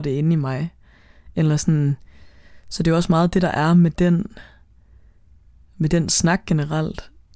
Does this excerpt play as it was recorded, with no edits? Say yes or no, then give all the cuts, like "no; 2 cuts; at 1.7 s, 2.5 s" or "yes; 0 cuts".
yes; 0 cuts